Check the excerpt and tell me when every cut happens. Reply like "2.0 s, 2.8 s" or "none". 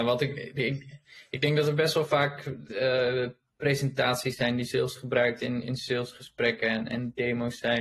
none